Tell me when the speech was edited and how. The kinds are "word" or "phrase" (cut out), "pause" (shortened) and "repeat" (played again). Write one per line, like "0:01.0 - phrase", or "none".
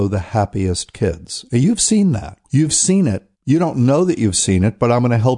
0:02.4 - pause
0:03.3 - pause